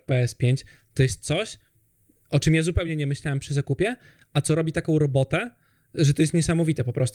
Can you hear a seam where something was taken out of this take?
no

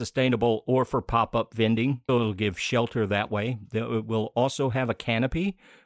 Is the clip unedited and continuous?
no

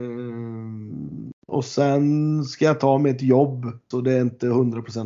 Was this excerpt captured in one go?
no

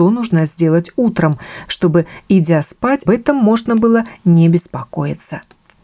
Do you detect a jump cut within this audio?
yes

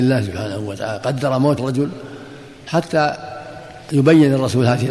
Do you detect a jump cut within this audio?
yes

